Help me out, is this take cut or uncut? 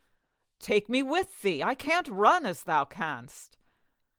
uncut